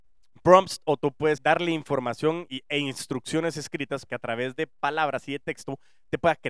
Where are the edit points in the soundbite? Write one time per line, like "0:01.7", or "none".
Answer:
0:01.4
0:02.5
0:04.1